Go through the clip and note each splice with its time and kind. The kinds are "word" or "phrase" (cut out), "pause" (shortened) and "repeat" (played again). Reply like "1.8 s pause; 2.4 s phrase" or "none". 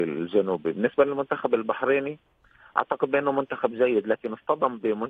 none